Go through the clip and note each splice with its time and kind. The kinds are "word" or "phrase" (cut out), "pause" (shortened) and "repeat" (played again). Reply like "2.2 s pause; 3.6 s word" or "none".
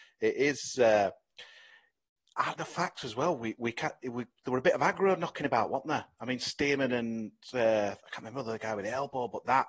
2.5 s word